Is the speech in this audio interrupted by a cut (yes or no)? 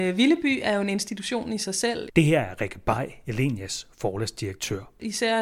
no